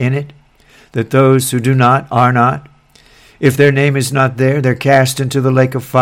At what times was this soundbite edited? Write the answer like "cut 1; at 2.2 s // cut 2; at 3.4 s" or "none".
none